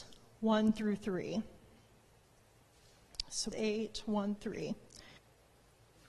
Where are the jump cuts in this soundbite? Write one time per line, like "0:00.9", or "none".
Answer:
0:03.5
0:04.4
0:05.2